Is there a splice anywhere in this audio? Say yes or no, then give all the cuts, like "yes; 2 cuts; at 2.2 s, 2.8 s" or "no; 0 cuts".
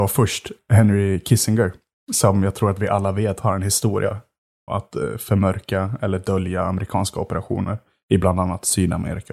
yes; 1 cut; at 4.7 s